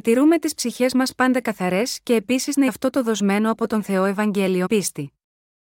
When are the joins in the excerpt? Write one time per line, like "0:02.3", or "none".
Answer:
0:02.7
0:04.7